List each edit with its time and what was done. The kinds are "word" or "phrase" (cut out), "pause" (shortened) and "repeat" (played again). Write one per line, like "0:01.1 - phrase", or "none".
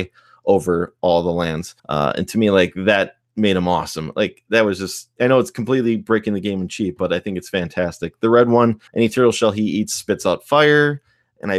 0:01.8 - pause
0:08.9 - pause